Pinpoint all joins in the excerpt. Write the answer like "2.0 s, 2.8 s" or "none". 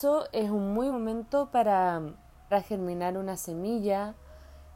0.9 s, 2.5 s